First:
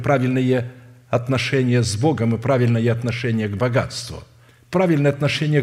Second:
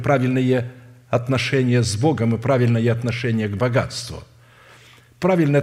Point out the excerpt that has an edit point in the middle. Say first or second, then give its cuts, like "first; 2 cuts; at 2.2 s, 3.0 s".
first; 1 cut; at 4.5 s